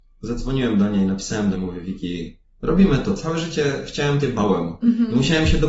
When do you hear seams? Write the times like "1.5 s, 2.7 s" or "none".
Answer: 1.5 s, 2.4 s, 4.2 s